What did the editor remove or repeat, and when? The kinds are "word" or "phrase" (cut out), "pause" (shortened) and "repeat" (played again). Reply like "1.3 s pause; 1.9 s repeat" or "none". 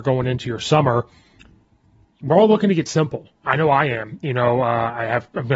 none